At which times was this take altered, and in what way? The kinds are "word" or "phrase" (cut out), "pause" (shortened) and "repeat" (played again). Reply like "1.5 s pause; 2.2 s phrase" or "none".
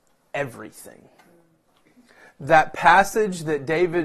none